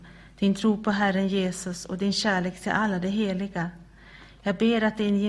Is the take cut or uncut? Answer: uncut